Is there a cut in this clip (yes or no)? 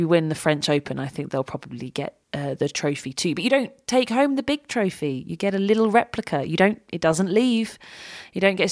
yes